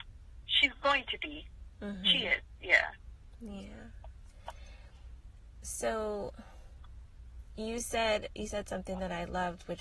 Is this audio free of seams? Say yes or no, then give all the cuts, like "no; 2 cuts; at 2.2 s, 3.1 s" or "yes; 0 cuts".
yes; 0 cuts